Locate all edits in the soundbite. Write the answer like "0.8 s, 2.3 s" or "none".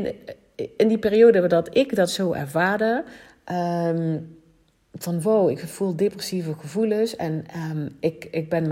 none